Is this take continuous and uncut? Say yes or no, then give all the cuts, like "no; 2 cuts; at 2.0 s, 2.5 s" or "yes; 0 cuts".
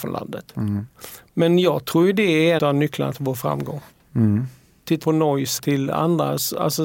no; 3 cuts; at 2.6 s, 5.0 s, 5.6 s